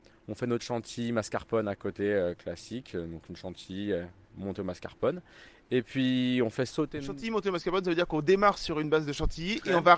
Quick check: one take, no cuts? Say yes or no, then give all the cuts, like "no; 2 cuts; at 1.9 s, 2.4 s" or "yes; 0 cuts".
yes; 0 cuts